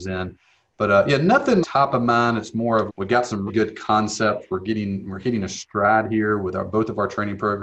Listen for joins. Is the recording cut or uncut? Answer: cut